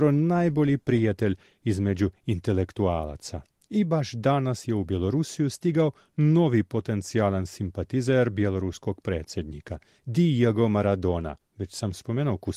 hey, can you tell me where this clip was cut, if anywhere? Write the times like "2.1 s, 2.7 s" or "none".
none